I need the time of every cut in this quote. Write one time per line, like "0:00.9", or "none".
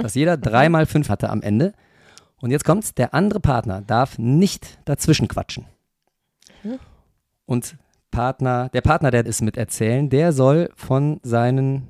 0:01.1
0:09.3